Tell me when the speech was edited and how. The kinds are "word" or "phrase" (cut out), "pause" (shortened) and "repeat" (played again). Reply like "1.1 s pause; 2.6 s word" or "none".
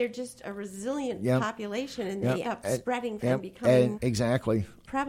2.4 s word; 3.2 s word; 3.9 s word